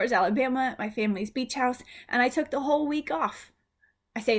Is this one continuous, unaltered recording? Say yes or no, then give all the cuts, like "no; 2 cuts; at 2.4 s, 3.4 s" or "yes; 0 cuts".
yes; 0 cuts